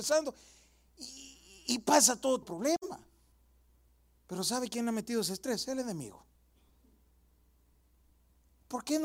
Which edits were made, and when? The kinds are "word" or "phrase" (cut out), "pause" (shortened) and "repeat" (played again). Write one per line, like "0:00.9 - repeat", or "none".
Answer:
0:02.4 - word
0:03.3 - pause